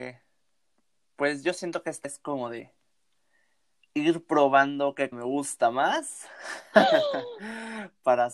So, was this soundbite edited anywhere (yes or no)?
yes